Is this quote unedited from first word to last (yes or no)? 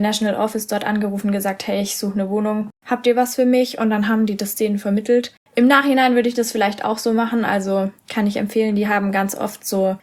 no